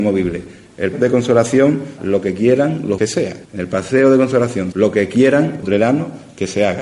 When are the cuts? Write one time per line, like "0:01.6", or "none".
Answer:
0:00.9
0:02.0
0:03.0
0:03.4
0:04.7
0:05.6